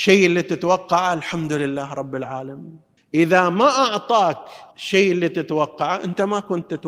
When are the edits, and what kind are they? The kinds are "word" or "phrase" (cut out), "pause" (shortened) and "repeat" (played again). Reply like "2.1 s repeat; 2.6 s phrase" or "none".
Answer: 3.0 s pause; 4.7 s pause